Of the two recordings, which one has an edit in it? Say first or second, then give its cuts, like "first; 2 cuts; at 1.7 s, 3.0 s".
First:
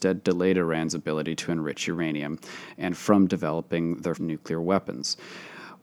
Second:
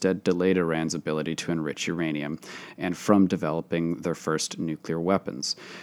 first; 1 cut; at 4.2 s